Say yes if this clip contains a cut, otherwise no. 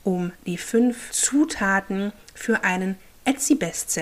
no